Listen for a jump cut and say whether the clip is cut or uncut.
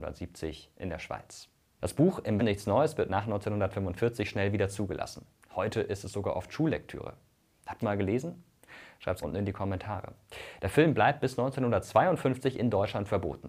cut